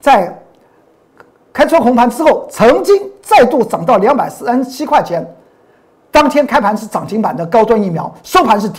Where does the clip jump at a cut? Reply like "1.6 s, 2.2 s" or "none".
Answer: none